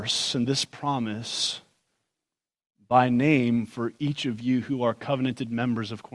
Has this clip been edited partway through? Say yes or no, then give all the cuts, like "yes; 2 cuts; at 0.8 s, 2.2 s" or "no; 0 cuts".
no; 0 cuts